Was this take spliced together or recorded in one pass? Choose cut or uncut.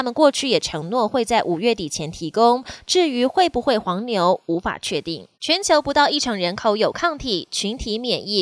cut